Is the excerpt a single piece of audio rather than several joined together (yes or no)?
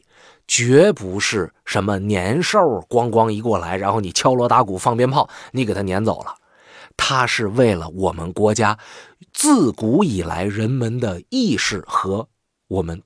yes